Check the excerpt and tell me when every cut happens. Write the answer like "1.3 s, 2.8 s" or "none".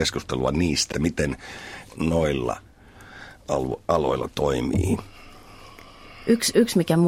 0.9 s, 1.9 s

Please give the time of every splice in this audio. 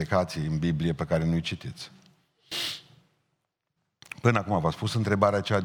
none

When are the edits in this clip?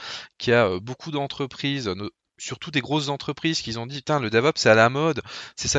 none

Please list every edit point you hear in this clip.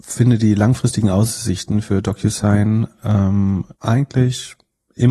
3.7 s

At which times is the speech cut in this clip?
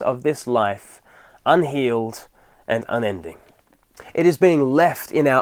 none

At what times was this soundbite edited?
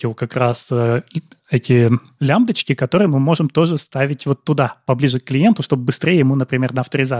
none

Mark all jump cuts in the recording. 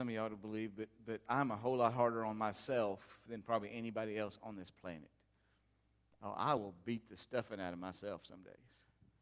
none

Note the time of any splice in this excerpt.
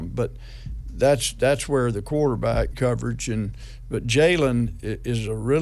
2.7 s

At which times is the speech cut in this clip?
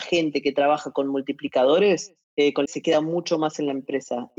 2.2 s, 2.7 s

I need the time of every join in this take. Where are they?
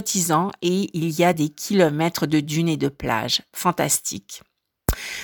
none

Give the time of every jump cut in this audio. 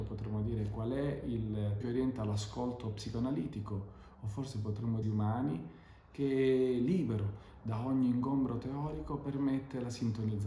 1.8 s, 5.0 s

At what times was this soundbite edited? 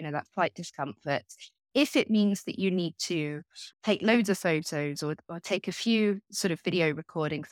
3.7 s

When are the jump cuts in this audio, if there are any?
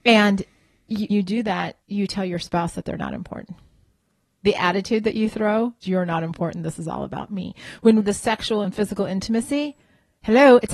1.1 s, 1.8 s, 5.8 s, 8.0 s, 8.6 s

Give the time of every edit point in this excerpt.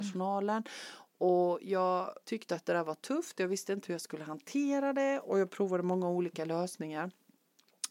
2.2 s, 3.8 s

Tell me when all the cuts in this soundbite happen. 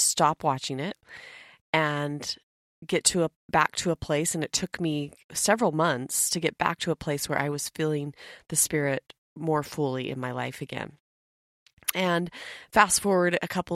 5.2 s

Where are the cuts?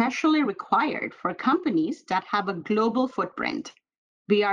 none

